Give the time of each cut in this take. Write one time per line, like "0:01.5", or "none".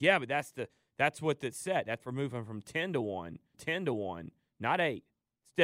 0:02.0
0:03.5